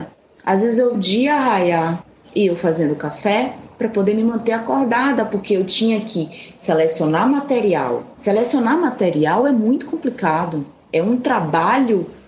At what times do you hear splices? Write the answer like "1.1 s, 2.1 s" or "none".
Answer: 0.9 s, 8.1 s